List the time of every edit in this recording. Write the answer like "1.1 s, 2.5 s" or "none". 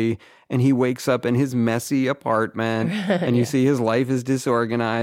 none